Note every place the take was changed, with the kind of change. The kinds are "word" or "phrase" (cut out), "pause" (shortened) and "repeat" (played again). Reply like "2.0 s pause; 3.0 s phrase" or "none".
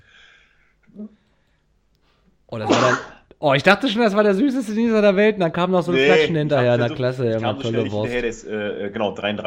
none